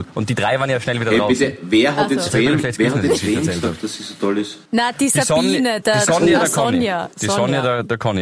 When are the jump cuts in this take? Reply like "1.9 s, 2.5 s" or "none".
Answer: 4.7 s